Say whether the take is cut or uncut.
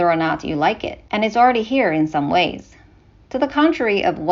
uncut